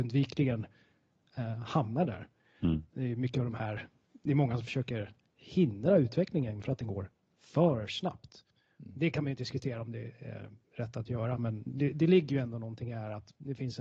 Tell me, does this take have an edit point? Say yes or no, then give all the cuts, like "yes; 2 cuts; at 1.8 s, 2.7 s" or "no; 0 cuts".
no; 0 cuts